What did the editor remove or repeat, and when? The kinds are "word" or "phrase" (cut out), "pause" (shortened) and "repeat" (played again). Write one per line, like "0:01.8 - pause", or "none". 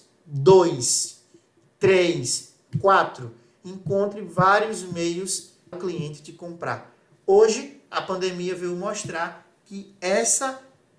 0:05.7 - word

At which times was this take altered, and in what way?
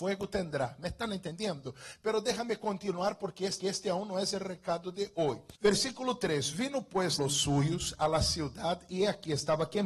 0:03.6 - repeat
0:05.6 - pause
0:07.2 - phrase

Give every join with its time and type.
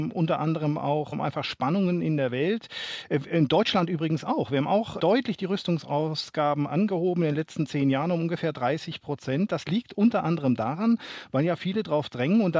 0:01.1 - phrase
0:05.0 - word

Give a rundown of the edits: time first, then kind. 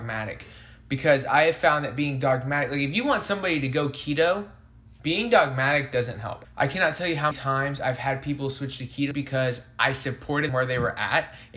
0:06.4 - word
0:07.3 - word
0:09.1 - word
0:10.5 - word

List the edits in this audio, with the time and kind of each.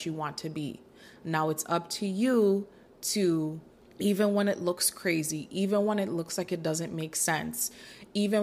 none

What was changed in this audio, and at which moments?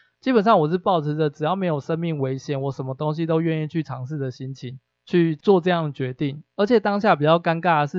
0:04.9 - pause
0:06.5 - pause

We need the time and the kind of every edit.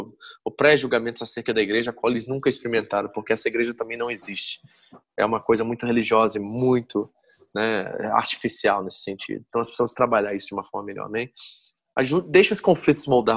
none

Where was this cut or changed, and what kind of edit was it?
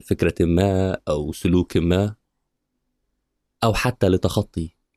none

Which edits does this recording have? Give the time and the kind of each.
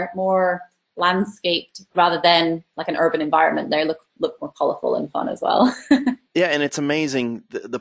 0:06.2 - pause

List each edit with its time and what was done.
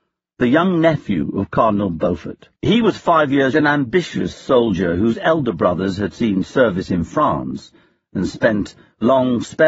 0:02.6 - pause
0:03.5 - phrase

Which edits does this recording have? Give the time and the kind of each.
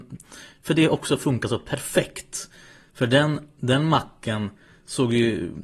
none

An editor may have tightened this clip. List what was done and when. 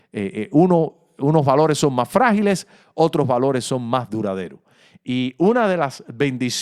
none

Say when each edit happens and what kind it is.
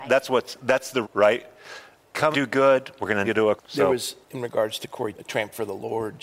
0:01.0 - word
0:02.3 - word
0:03.2 - word
0:03.6 - word
0:04.2 - word
0:05.1 - word

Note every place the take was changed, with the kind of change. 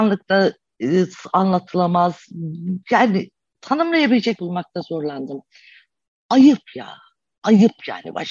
0:02.8 - pause
0:04.4 - word

